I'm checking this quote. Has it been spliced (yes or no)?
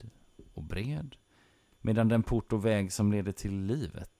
no